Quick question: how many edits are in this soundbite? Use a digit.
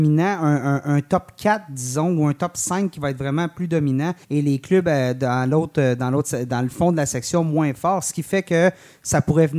1